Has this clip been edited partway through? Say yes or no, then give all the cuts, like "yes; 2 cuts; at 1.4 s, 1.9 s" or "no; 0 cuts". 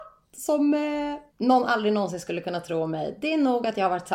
yes; 1 cut; at 1.3 s